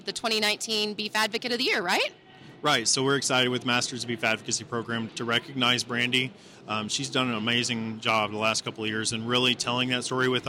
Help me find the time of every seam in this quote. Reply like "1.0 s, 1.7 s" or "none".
5.1 s